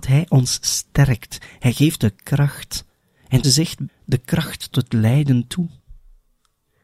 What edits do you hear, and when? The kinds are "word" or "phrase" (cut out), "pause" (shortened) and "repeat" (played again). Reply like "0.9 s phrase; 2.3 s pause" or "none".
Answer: 2.0 s word; 3.4 s word; 3.9 s word; 4.7 s word